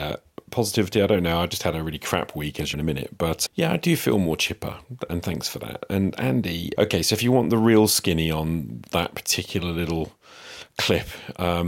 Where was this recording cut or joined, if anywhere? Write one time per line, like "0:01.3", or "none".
0:02.7
0:03.5
0:06.8